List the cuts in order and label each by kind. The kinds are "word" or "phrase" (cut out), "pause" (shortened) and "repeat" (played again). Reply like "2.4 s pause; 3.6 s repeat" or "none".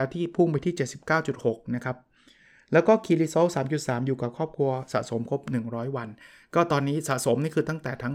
none